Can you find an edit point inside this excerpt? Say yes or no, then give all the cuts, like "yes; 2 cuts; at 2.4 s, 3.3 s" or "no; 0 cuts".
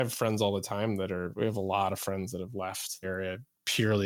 yes; 1 cut; at 3.0 s